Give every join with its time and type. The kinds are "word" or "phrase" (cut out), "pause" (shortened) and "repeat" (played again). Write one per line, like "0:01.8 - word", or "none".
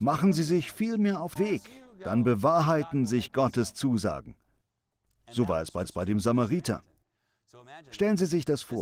0:01.4 - word
0:05.8 - repeat